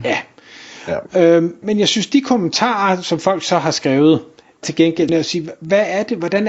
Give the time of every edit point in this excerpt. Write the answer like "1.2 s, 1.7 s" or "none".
1.6 s, 4.6 s, 5.1 s